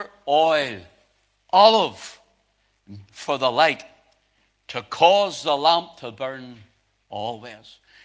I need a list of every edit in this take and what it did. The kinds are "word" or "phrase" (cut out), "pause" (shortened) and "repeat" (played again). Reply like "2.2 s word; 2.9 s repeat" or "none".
3.1 s word